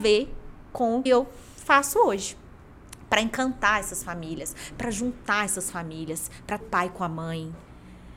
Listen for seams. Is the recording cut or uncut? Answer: cut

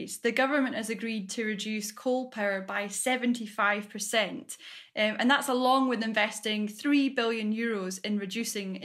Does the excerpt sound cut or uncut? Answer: uncut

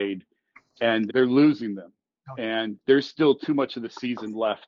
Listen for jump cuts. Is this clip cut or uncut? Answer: cut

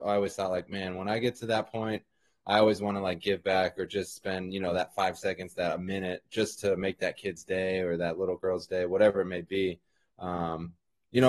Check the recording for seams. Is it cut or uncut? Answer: uncut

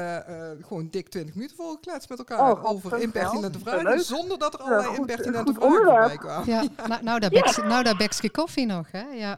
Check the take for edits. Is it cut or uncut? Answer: uncut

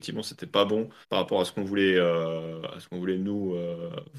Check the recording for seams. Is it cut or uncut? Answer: cut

